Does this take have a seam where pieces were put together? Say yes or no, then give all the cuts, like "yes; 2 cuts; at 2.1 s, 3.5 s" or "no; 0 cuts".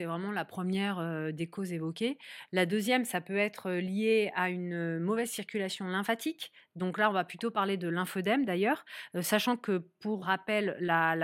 yes; 1 cut; at 10.2 s